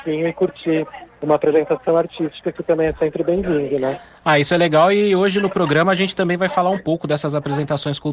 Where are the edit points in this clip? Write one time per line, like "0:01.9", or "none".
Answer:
none